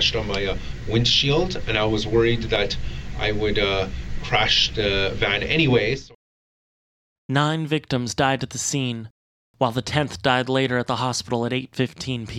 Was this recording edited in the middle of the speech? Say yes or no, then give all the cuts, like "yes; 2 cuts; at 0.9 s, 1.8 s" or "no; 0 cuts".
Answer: no; 0 cuts